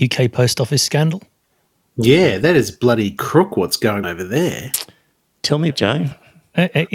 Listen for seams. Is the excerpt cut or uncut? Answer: cut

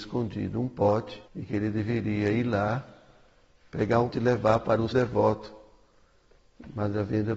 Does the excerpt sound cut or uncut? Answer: cut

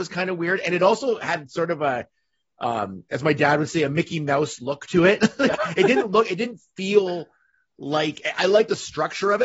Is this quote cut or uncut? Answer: uncut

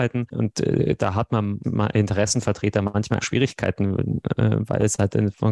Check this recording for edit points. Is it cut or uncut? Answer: cut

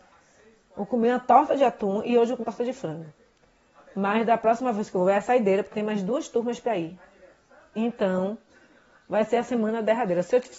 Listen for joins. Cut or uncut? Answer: cut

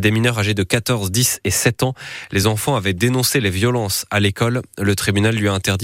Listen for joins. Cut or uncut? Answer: uncut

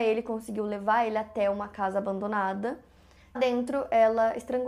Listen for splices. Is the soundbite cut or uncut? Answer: cut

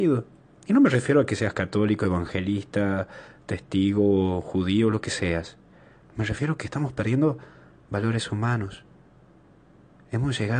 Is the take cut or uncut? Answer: uncut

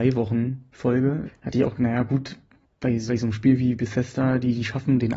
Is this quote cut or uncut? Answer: cut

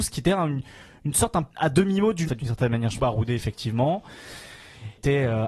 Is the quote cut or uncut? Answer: cut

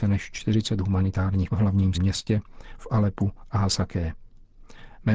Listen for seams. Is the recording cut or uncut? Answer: cut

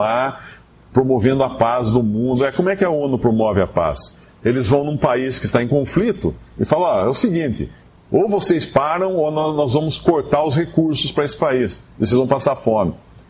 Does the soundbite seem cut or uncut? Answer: uncut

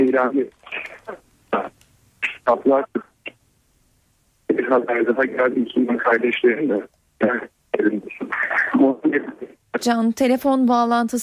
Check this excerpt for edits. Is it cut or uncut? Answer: uncut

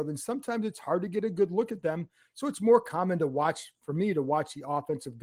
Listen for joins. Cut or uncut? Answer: uncut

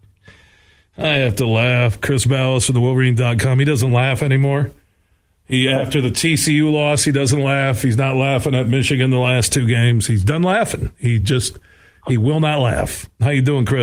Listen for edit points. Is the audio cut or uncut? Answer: uncut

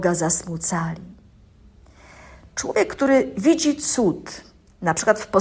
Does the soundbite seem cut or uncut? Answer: uncut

